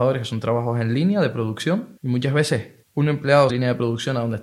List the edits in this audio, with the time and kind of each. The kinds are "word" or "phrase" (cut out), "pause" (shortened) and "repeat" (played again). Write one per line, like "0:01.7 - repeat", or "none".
0:02.0 - pause
0:02.8 - pause
0:03.5 - phrase